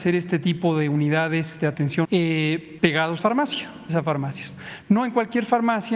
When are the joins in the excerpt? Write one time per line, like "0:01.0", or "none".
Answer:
0:02.0
0:03.2
0:03.9

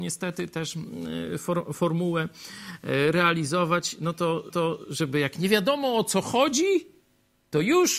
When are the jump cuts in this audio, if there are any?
0:04.5

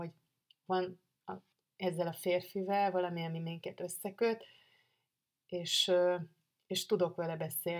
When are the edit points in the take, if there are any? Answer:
none

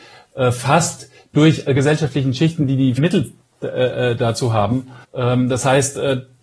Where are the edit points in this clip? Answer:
0:01.7
0:03.0
0:05.0

